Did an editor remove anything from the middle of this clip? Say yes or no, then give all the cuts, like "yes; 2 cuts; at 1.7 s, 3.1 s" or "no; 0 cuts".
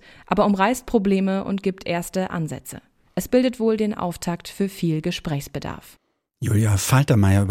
no; 0 cuts